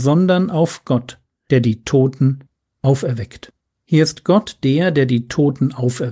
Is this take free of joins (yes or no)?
yes